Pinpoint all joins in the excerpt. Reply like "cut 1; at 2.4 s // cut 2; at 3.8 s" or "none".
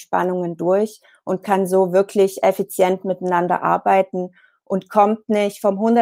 none